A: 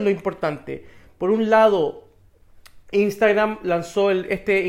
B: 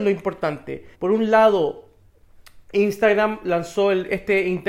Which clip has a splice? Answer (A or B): B